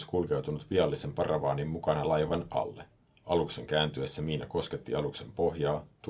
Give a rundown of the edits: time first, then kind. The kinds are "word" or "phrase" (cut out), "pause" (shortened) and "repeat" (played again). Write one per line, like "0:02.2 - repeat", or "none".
0:03.0 - pause

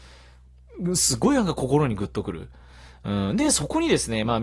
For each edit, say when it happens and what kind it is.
none

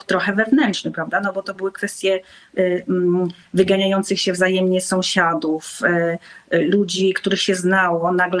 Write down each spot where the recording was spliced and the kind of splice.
none

